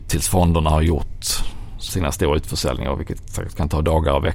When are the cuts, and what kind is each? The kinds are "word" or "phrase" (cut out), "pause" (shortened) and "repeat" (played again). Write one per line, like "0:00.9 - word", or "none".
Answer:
0:01.9 - word